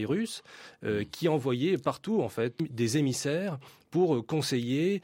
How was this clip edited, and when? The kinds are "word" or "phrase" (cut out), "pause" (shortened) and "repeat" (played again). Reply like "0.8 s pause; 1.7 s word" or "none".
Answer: 2.6 s word